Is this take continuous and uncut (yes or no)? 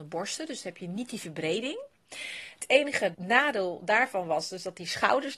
yes